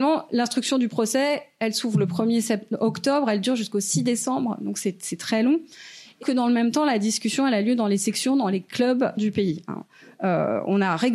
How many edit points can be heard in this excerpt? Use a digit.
2